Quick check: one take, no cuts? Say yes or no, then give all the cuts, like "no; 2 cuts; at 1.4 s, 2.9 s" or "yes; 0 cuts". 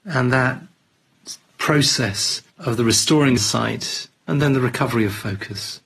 no; 3 cuts; at 2.5 s, 3.4 s, 4.2 s